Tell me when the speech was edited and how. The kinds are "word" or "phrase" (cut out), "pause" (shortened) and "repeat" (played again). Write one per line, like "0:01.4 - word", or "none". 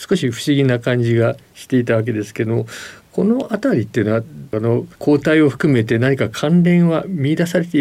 0:04.9 - pause